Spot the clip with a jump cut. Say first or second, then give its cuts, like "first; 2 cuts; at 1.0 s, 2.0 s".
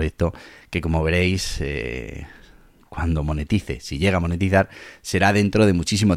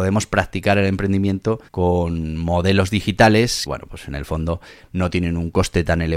second; 2 cuts; at 1.7 s, 3.7 s